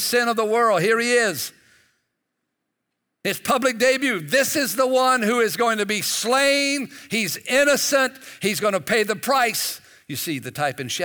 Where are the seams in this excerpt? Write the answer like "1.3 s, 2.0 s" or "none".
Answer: none